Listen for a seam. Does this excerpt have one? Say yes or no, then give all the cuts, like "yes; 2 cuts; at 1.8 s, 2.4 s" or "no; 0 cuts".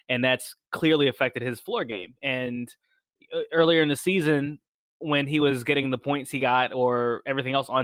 no; 0 cuts